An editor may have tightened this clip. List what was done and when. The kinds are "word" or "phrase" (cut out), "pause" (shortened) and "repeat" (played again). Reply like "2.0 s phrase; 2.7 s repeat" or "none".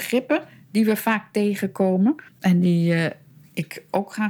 2.3 s pause